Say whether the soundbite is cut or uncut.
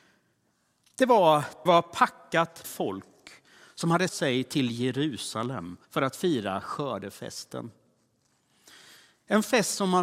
cut